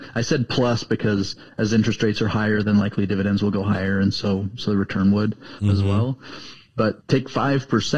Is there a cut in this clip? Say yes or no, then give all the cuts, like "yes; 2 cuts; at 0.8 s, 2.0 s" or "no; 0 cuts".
no; 0 cuts